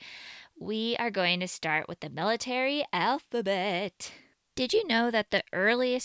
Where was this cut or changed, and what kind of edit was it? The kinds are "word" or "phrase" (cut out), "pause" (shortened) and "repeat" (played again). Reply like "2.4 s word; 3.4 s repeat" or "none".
none